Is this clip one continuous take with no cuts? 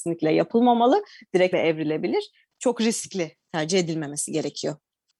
no; 2 cuts; at 1.5 s, 3.4 s

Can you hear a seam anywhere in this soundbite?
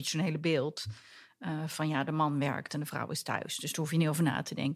no; 0 cuts

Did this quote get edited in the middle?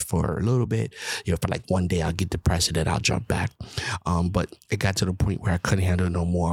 no; 0 cuts

